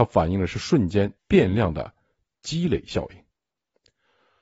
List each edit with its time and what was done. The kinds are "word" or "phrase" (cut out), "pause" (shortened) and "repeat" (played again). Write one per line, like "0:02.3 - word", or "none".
0:01.2 - pause